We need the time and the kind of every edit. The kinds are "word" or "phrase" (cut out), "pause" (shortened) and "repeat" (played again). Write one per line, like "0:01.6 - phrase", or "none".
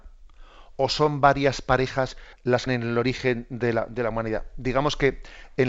0:02.3 - pause
0:02.7 - word